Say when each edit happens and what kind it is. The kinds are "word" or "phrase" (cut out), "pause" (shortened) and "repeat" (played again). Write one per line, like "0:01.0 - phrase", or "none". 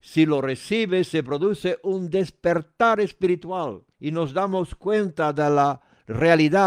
0:03.9 - pause